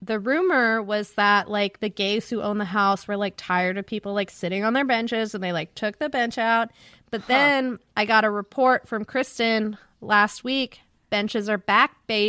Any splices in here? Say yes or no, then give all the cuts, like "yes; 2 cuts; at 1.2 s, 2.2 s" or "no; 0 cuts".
no; 0 cuts